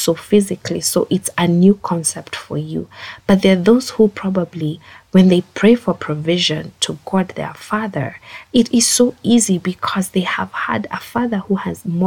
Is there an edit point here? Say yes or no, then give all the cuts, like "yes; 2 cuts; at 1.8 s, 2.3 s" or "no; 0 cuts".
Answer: no; 0 cuts